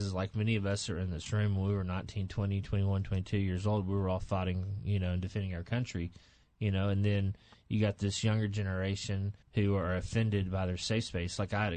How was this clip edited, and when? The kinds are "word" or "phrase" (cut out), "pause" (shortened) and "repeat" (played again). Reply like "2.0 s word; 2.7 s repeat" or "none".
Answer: 9.4 s pause